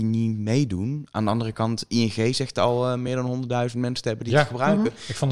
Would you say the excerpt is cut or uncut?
uncut